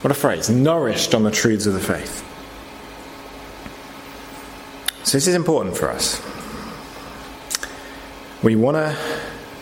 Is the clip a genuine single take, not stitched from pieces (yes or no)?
yes